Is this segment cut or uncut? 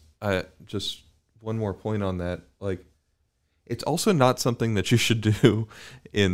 uncut